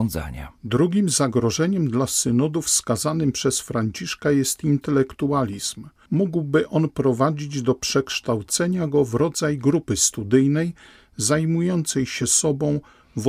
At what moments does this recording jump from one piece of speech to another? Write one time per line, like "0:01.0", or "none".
none